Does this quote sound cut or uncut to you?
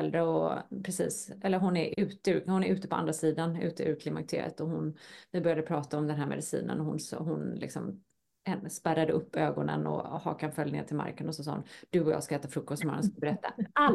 uncut